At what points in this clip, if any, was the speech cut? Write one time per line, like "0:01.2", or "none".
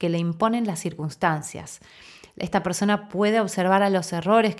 none

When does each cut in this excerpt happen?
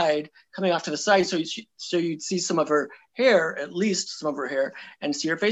none

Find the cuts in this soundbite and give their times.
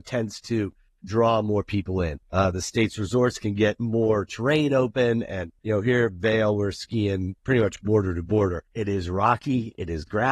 0:02.2
0:05.6
0:07.4
0:08.7

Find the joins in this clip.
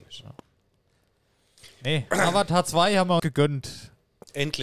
0:03.2

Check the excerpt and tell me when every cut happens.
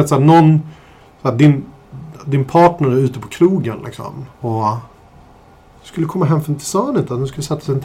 0:04.3

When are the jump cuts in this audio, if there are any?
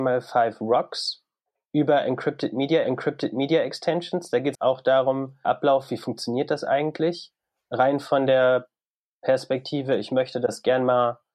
0:02.8
0:04.5
0:05.4

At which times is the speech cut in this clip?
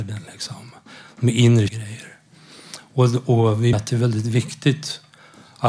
0:01.7
0:03.7

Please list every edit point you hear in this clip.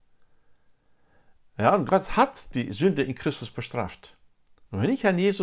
none

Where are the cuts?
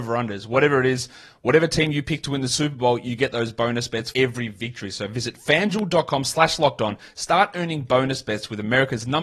0:04.1

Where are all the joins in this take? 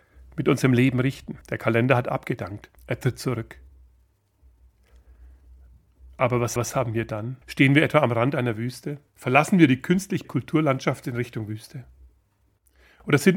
0:01.4
0:02.8
0:06.6
0:07.4
0:09.1
0:10.2

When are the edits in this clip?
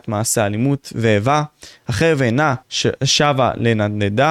0:02.6

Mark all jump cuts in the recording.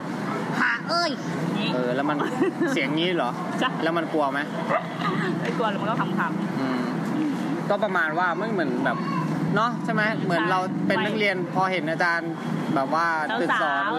none

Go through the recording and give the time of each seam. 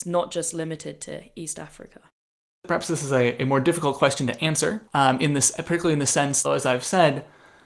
0:04.9
0:06.4

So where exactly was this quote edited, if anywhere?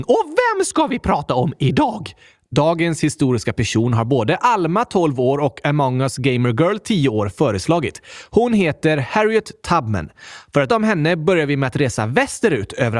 0:10.7

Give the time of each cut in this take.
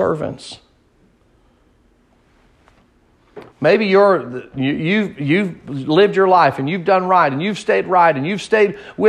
0:03.5

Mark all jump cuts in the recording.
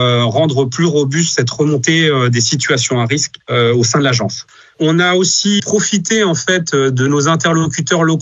0:05.6

